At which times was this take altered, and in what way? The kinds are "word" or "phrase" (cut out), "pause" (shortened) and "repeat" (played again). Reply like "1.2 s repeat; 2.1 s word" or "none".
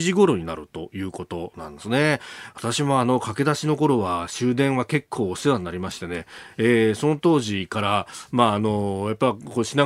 none